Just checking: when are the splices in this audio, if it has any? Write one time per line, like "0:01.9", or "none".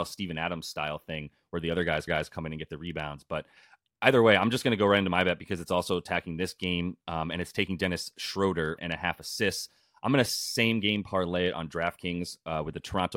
0:02.1
0:08.8